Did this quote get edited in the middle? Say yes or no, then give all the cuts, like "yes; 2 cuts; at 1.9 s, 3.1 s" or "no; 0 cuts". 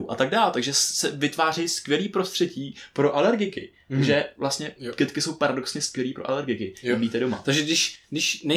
no; 0 cuts